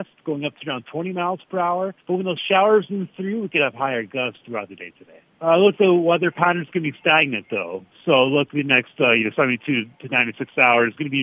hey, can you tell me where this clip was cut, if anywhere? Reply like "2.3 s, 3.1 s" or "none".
2.0 s, 4.4 s, 5.8 s, 8.5 s